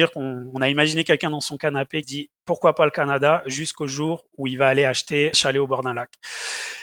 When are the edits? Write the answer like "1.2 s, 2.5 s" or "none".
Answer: 2.0 s, 2.4 s, 5.3 s

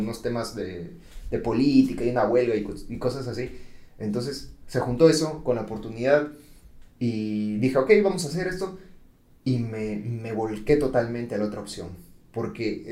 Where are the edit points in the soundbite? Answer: none

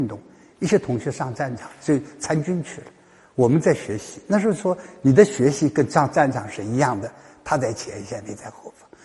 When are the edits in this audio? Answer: none

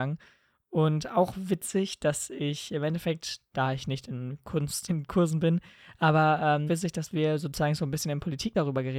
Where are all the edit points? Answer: 4.9 s, 6.7 s

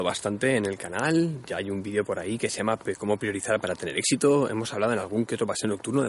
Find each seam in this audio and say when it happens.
none

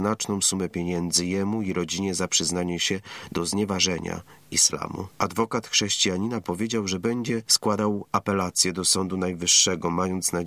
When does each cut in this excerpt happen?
none

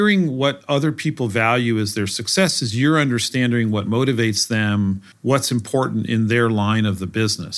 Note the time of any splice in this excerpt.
5.1 s

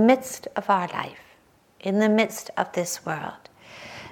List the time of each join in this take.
none

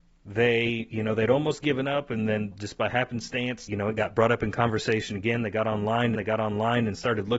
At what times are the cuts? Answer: 3.7 s, 6.2 s

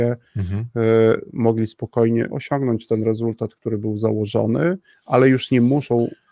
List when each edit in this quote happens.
2.3 s, 4.9 s

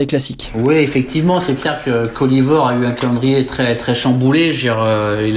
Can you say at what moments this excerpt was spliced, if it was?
none

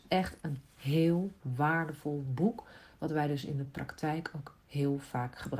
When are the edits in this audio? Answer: none

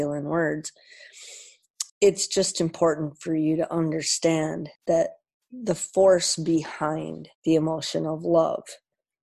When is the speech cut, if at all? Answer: 1.9 s, 4.8 s, 7.3 s

